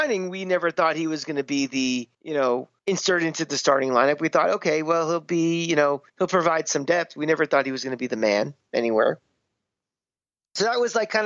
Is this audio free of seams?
no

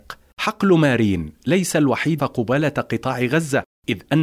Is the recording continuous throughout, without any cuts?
no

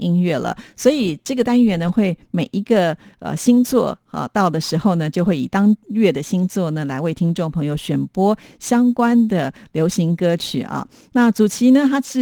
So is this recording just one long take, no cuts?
yes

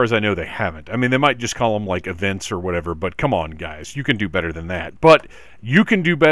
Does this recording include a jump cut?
no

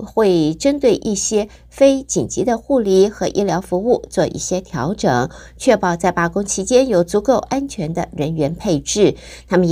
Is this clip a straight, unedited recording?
yes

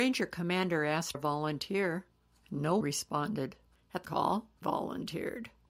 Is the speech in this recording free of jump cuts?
no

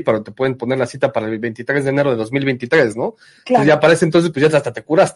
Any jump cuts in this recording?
no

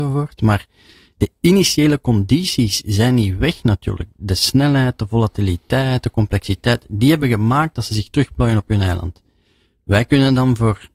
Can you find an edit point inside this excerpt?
no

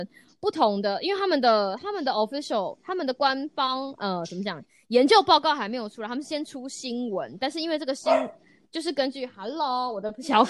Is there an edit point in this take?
no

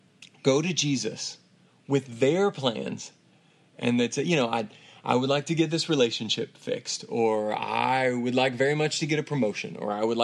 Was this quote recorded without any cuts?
yes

